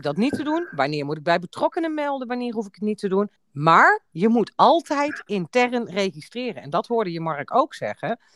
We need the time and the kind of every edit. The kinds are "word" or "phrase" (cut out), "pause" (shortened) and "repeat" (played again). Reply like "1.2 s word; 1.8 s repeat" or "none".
3.4 s pause